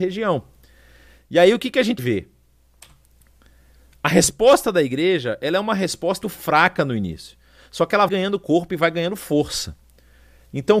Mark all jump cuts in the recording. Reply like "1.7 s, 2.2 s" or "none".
2.0 s, 6.2 s, 8.1 s